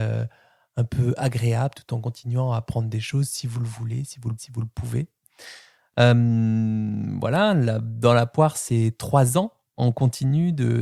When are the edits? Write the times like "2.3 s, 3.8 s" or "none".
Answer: 4.4 s